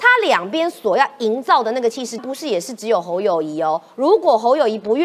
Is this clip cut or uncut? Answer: cut